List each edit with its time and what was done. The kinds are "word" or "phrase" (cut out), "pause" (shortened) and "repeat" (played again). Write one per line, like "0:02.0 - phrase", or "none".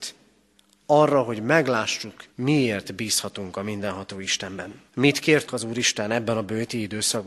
0:02.3 - pause
0:04.9 - pause
0:05.5 - word